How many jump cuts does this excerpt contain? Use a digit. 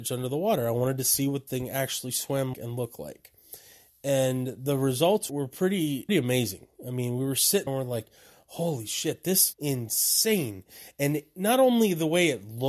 6